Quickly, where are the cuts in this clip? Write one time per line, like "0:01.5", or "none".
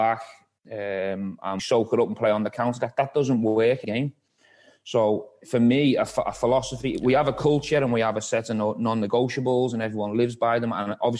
0:01.6
0:03.8

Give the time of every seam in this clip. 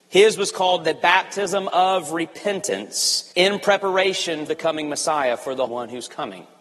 0:03.3
0:04.5
0:05.7

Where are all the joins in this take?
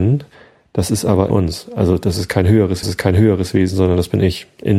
0:01.3
0:02.8

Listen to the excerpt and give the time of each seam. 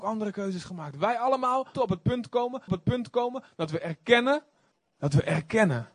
0:01.7
0:02.7
0:04.7

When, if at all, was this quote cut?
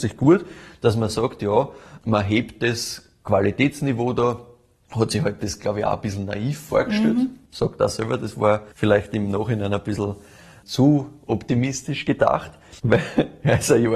0:08.7
0:12.8

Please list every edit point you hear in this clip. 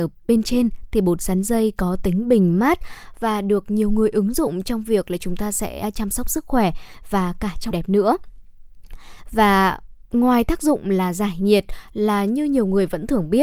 0:07.7

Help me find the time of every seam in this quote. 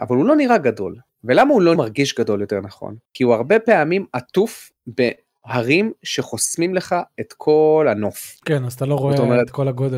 0:01.1
0:01.8
0:03.1
0:04.8

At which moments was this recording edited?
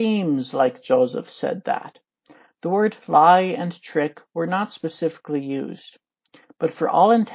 none

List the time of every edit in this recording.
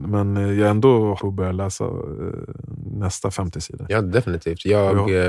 0:01.2

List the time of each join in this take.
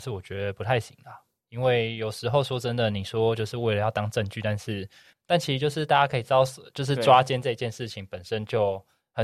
none

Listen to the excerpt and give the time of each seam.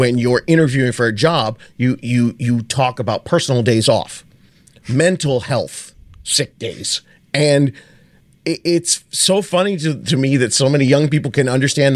none

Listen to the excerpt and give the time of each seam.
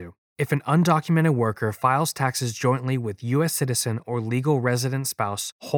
none

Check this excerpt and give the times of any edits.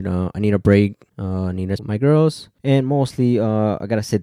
0:01.1
0:01.8
0:02.6

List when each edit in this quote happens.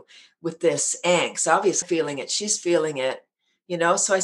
0:01.8

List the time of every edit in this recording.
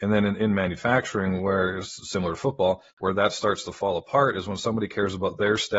0:02.9

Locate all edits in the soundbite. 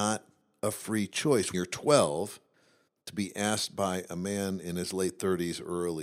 0:01.5

